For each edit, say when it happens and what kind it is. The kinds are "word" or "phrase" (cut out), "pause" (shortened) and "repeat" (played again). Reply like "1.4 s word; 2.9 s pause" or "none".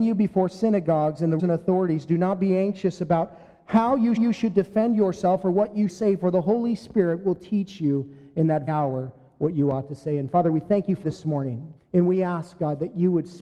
1.4 s word; 4.2 s repeat; 5.9 s word; 8.7 s word; 11.0 s phrase; 11.8 s pause